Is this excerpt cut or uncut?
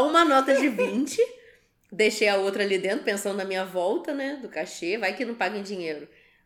uncut